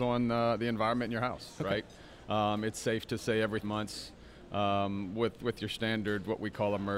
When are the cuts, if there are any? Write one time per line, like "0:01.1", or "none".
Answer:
0:03.6

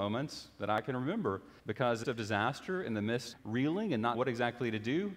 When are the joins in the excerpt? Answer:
0:01.6
0:02.0
0:03.3
0:04.1

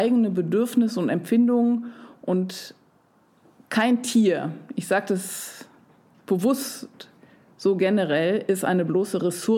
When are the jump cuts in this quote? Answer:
none

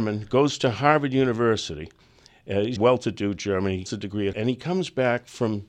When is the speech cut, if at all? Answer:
0:02.8
0:03.9
0:04.3

